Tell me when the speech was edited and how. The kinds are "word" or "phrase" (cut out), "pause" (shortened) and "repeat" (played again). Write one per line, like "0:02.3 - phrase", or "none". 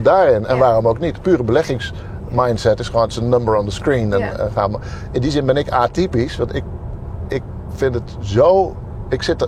none

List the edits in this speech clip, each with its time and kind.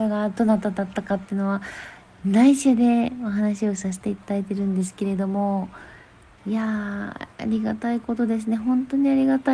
none

